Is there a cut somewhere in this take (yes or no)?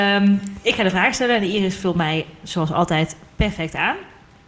no